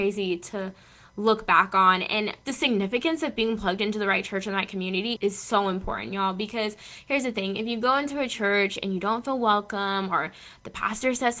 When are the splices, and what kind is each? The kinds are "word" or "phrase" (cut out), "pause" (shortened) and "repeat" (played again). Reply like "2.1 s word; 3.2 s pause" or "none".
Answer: 2.4 s word; 5.2 s word